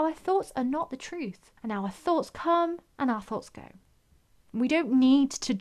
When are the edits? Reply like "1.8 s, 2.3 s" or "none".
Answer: 1.6 s